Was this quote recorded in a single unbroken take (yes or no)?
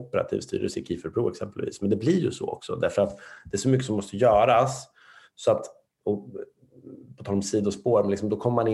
yes